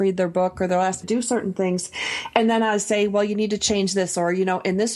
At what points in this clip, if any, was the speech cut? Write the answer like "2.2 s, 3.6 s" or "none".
1.0 s